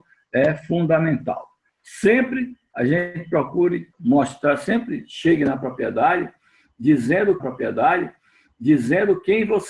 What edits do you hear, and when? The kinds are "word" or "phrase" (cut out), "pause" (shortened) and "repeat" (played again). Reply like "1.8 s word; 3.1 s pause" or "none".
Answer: 3.9 s pause; 7.4 s repeat